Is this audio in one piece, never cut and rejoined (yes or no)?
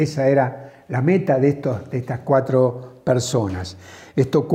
yes